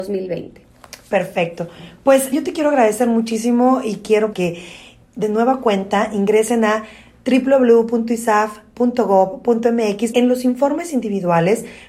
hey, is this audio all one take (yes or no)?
no